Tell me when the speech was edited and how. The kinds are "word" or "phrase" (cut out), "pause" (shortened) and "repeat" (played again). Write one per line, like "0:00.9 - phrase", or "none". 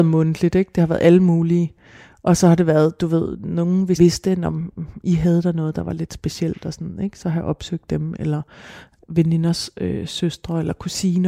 0:04.0 - word

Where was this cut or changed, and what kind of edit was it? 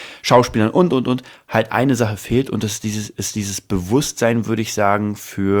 none

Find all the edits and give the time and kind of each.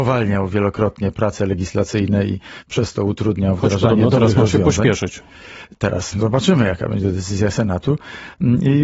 0:06.1 - word

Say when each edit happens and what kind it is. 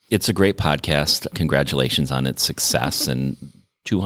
none

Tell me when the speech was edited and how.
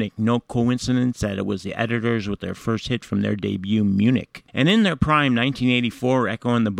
0:04.5 - pause

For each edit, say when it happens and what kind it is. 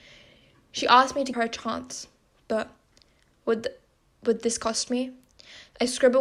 0:01.3 - word

